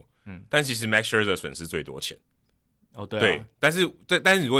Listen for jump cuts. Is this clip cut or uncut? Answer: uncut